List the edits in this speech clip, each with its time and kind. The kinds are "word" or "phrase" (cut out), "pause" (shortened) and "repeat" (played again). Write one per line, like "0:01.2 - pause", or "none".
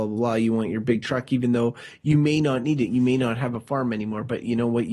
none